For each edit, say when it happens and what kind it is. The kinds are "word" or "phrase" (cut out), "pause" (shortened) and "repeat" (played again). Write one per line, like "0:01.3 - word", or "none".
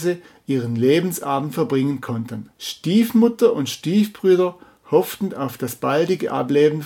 0:02.5 - pause

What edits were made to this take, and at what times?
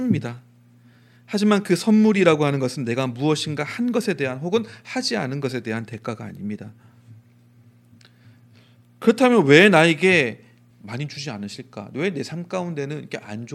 0:10.7 - phrase

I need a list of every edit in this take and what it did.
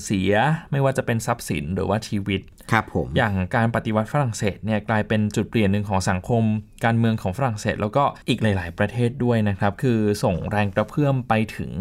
0:08.2 - pause

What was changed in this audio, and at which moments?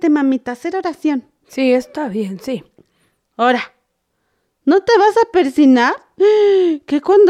none

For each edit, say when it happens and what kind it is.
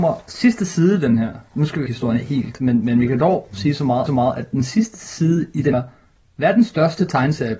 0:01.9 - phrase
0:04.1 - repeat
0:05.7 - phrase

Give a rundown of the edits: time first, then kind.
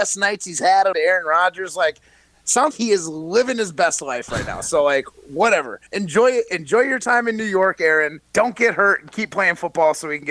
0:00.9 - phrase
0:02.7 - word
0:05.9 - pause
0:08.2 - pause

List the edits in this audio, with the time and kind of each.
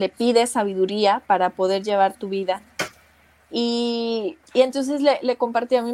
0:04.4 - pause

